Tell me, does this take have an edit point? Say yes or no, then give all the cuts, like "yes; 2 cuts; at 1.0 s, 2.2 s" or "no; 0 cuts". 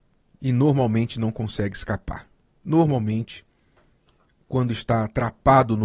no; 0 cuts